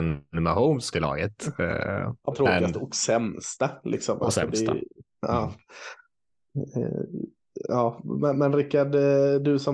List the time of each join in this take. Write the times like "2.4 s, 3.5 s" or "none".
0.9 s, 2.3 s, 8.3 s